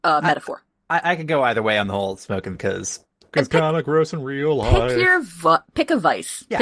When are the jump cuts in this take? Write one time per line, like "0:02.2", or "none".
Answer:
0:02.5
0:03.3